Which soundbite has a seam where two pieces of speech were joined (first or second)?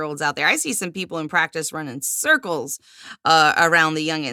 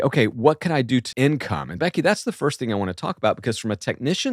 second